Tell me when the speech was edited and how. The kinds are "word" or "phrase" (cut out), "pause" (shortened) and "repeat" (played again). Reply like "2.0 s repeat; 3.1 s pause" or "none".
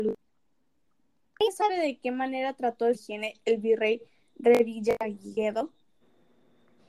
2.9 s phrase